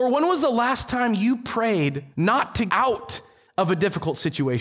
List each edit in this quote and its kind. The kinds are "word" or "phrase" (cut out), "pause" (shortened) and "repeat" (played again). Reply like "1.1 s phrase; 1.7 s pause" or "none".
2.1 s pause; 2.7 s word